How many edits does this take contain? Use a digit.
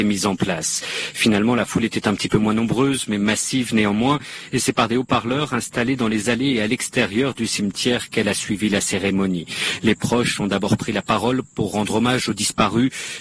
0